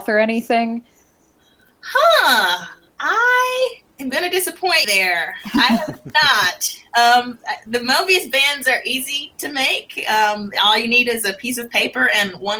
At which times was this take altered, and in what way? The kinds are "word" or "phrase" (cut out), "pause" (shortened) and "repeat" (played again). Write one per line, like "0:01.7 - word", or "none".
0:03.9 - pause
0:04.8 - word